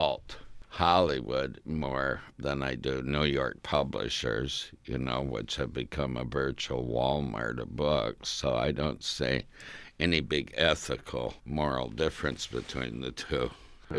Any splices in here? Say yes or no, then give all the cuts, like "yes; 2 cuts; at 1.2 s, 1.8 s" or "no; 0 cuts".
yes; 2 cuts; at 2.3 s, 11.4 s